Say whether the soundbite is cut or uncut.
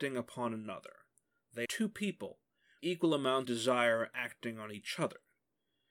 cut